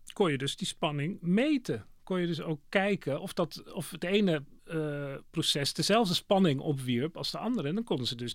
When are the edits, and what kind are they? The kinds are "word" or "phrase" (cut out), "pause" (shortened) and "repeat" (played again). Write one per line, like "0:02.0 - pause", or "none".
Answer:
0:04.6 - pause